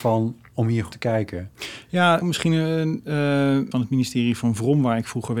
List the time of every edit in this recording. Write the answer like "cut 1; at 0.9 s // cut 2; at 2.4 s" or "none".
cut 1; at 0.9 s // cut 2; at 2.2 s // cut 3; at 3.7 s